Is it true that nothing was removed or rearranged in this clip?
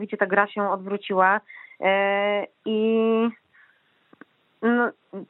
yes; 0 cuts

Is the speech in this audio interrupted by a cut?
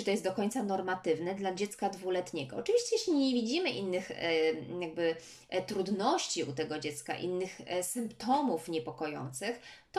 no; 0 cuts

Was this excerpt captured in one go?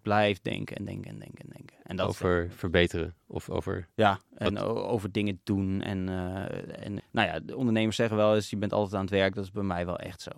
no; 1 cut; at 7.0 s

